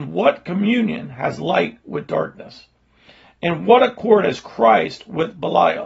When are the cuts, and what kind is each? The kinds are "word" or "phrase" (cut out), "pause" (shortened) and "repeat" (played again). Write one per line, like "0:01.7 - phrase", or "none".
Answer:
none